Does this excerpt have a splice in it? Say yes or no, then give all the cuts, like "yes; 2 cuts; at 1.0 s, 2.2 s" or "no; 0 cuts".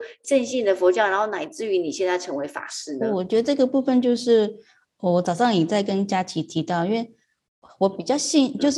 no; 0 cuts